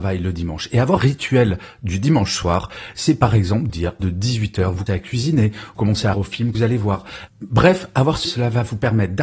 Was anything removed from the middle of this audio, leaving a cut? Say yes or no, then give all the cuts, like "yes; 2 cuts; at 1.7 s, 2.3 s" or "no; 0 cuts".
yes; 8 cuts; at 1.0 s, 3.7 s, 4.0 s, 4.9 s, 5.8 s, 6.1 s, 6.5 s, 8.2 s